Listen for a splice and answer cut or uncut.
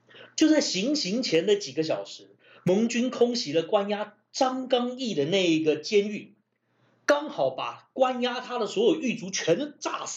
uncut